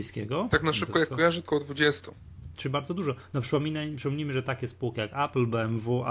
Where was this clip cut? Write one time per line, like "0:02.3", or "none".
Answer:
0:01.5